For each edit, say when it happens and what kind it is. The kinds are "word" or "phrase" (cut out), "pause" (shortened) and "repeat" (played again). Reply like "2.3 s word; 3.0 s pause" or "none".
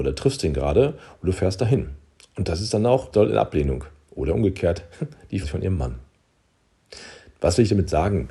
3.1 s word; 5.4 s word